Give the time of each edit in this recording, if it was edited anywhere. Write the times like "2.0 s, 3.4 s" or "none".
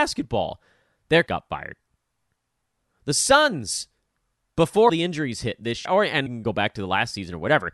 1.3 s, 4.9 s, 5.9 s, 6.3 s